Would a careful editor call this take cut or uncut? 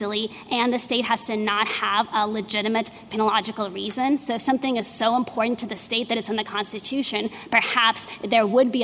uncut